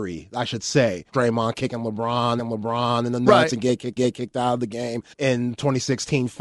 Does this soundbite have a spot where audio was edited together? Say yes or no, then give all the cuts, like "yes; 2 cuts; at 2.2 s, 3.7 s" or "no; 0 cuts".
yes; 4 cuts; at 1.1 s, 2.4 s, 4.0 s, 5.1 s